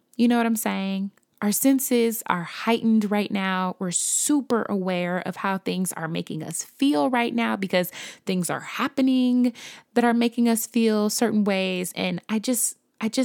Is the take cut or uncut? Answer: uncut